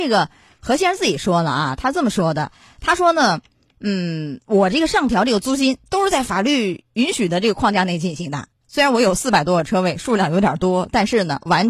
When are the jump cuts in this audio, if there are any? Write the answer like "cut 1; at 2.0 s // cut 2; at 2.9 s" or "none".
none

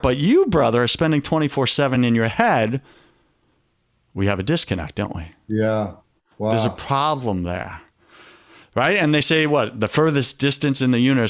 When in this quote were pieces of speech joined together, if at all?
none

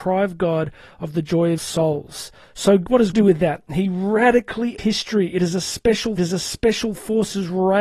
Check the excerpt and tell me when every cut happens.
cut 1; at 1.6 s // cut 2; at 2.4 s // cut 3; at 3.1 s // cut 4; at 4.8 s // cut 5; at 6.2 s

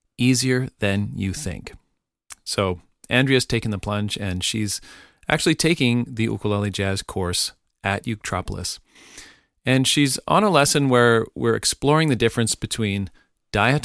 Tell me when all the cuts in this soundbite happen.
none

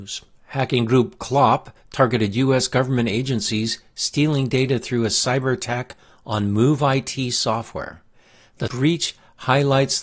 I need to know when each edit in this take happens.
cut 1; at 8.7 s

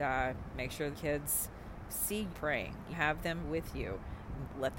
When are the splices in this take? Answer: cut 1; at 0.9 s // cut 2; at 2.3 s // cut 3; at 2.9 s // cut 4; at 3.4 s

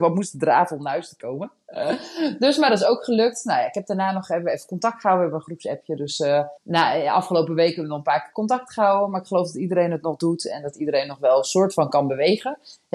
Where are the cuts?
cut 1; at 6.6 s

